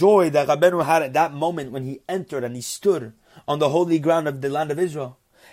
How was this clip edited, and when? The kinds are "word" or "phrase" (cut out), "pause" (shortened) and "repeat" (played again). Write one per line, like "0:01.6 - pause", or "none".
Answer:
none